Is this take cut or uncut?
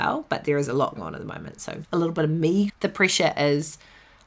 cut